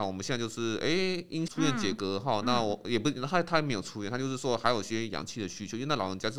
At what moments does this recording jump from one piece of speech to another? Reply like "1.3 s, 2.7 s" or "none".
1.5 s